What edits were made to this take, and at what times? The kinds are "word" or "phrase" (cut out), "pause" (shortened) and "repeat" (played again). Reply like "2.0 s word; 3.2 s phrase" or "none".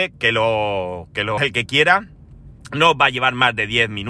1.4 s word